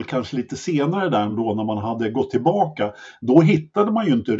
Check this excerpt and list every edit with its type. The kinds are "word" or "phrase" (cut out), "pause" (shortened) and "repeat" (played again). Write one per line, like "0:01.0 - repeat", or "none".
none